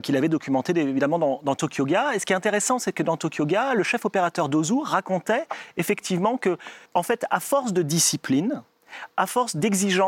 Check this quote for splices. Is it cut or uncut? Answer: cut